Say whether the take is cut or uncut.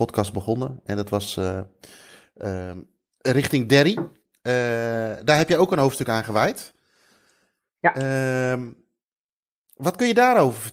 uncut